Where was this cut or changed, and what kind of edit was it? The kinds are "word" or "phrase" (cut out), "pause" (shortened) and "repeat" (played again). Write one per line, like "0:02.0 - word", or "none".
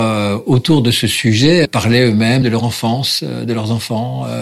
0:01.6 - word
0:02.4 - word